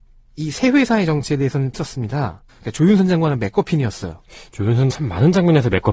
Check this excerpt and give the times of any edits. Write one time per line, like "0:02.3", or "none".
0:01.7
0:02.5
0:04.9